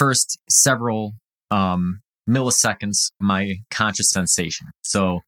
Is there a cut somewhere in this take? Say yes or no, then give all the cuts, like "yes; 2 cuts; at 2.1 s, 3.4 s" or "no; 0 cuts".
yes; 2 cuts; at 3.2 s, 4.1 s